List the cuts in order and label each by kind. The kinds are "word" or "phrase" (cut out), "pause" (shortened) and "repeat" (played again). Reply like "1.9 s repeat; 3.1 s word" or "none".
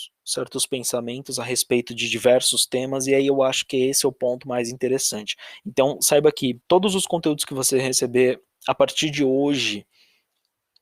6.6 s pause